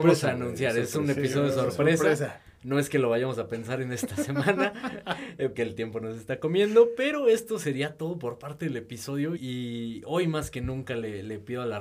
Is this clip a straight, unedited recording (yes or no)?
no